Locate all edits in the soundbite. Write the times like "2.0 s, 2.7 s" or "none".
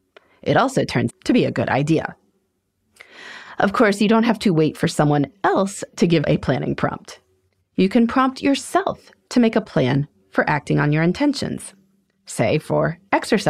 1.1 s, 6.2 s